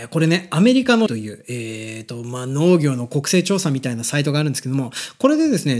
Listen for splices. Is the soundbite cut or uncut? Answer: cut